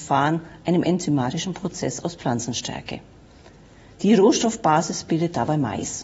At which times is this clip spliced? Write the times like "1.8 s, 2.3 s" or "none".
none